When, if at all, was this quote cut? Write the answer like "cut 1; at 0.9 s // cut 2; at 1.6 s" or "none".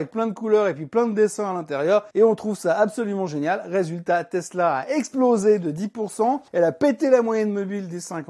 cut 1; at 2.1 s // cut 2; at 6.5 s